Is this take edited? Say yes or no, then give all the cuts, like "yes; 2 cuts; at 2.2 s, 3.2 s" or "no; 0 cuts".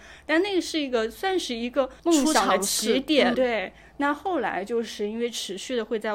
yes; 2 cuts; at 2.0 s, 3.3 s